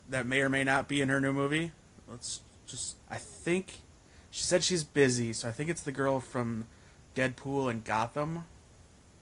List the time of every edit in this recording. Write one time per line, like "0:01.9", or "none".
0:03.0